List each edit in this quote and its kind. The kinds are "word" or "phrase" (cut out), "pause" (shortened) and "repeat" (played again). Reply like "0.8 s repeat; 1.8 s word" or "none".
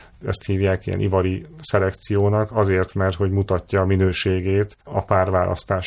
2.9 s word; 4.8 s pause